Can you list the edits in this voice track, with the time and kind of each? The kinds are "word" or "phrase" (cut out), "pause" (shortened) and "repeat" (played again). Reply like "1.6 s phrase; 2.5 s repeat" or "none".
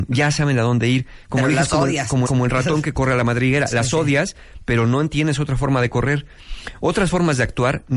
2.3 s repeat